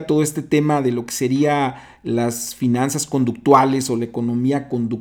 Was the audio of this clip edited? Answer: no; 0 cuts

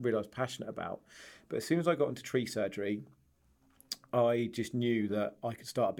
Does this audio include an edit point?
no; 0 cuts

